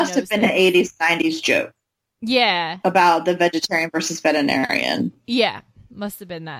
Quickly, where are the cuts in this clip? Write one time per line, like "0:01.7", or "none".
none